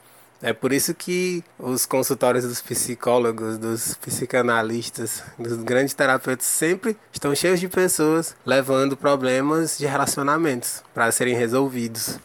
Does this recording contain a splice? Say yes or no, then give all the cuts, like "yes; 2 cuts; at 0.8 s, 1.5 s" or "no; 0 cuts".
yes; 4 cuts; at 1.5 s, 7.1 s, 8.4 s, 10.9 s